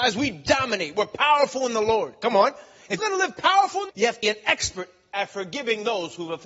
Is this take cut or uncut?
cut